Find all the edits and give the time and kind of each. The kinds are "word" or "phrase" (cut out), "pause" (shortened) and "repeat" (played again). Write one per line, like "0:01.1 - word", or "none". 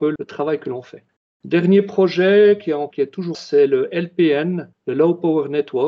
0:02.9 - word
0:03.3 - word